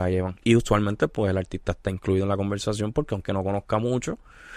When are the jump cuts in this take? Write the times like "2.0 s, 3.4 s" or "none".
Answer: none